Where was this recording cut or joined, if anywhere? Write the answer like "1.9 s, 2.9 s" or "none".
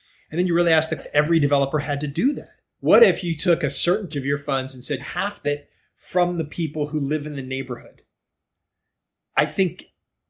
1.0 s, 2.7 s, 4.1 s, 5.0 s, 5.4 s